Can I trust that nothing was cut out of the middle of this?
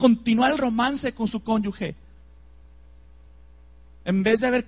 yes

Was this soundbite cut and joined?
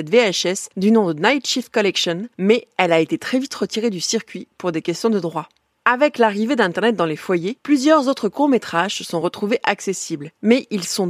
no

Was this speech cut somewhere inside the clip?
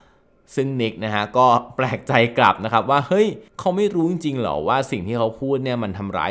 yes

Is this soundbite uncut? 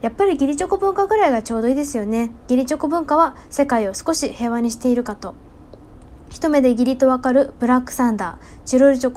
no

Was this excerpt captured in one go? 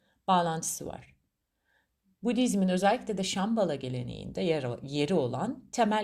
yes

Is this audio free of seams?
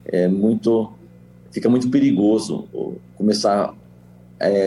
yes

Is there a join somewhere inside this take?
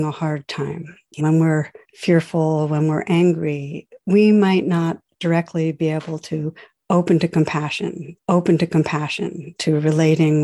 yes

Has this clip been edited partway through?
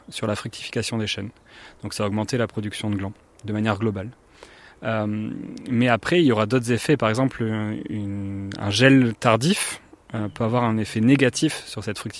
no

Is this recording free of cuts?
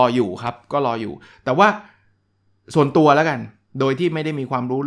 yes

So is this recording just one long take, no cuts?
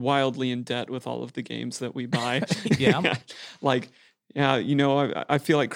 yes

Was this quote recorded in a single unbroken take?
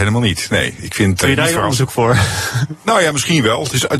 no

